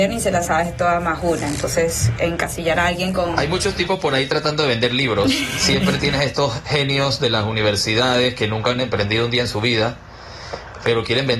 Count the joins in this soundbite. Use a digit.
0